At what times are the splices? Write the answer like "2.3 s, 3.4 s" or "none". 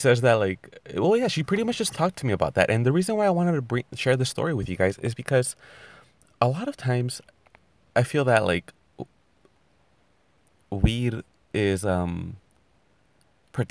none